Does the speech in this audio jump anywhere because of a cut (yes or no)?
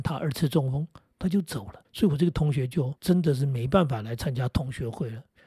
yes